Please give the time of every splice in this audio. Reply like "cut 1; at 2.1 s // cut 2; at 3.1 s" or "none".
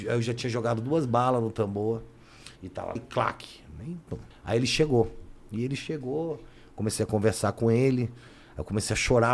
cut 1; at 2.5 s // cut 2; at 3.0 s // cut 3; at 4.3 s